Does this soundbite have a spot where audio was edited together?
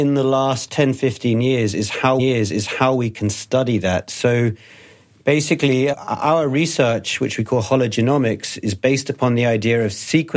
yes; 2 cuts; at 2.2 s, 5.9 s

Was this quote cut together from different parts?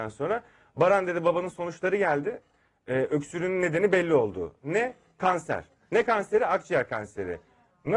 no; 0 cuts

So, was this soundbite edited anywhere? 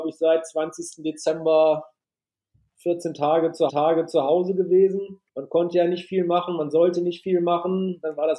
yes; 2 cuts; at 3.7 s, 5.3 s

